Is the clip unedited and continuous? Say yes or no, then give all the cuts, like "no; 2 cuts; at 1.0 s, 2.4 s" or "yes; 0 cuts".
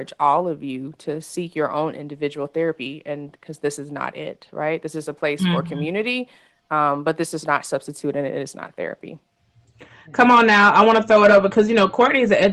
yes; 0 cuts